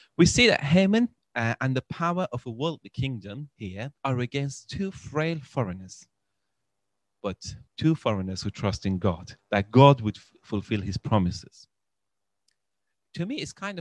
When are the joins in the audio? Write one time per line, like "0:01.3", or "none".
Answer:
0:04.0
0:07.7
0:09.4